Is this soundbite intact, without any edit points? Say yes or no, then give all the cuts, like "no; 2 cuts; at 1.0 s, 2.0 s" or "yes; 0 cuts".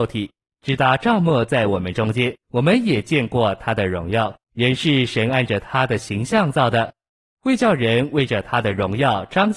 no; 2 cuts; at 2.4 s, 4.4 s